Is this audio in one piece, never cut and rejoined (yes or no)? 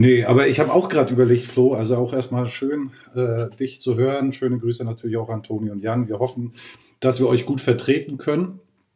yes